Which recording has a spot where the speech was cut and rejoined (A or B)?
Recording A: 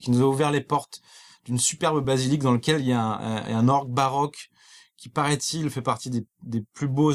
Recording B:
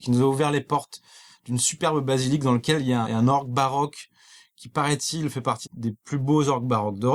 B